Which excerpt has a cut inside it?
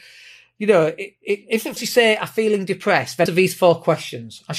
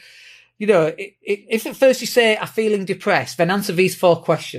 first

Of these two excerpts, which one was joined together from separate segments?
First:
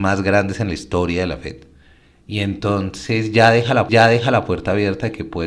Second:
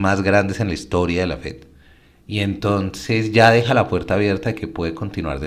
first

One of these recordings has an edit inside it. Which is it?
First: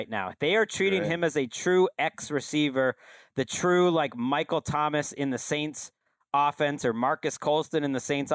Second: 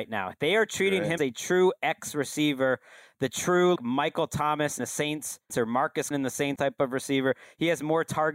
second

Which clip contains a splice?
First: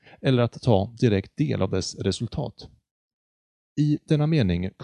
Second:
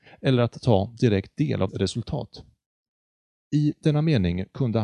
second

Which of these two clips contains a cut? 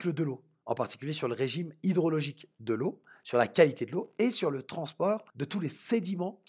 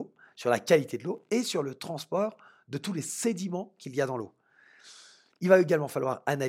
first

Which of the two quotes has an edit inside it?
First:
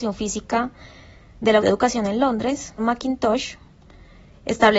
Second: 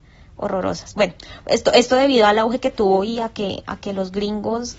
first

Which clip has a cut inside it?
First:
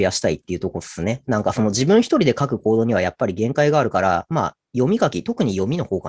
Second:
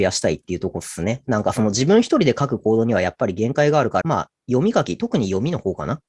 second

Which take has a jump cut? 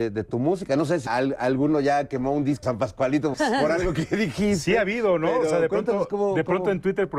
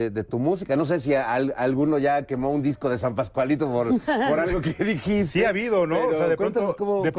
first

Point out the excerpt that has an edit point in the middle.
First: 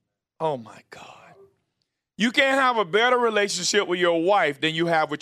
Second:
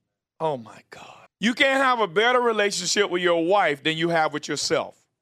second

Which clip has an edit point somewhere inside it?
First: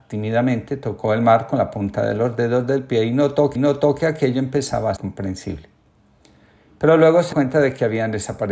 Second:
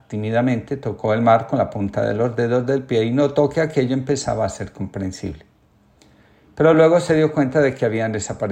first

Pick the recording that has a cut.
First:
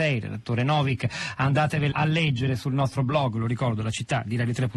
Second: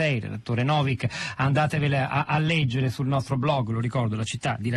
first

